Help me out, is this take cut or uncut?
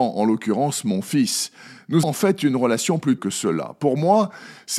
cut